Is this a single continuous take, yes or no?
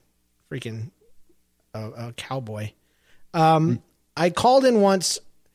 yes